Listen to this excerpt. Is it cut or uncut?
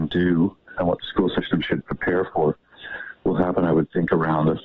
uncut